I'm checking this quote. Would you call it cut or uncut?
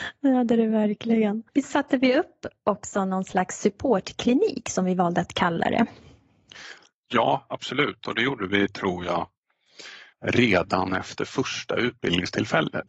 cut